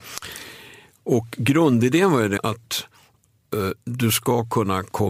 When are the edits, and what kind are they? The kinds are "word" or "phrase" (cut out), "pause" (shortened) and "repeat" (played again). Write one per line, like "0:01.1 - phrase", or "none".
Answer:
0:02.4 - word